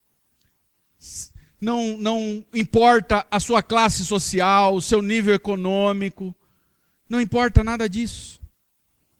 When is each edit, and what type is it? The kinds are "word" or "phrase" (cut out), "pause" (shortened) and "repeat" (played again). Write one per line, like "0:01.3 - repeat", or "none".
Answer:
none